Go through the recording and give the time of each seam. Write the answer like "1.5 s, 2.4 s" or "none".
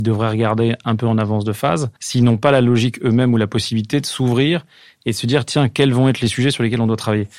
2.0 s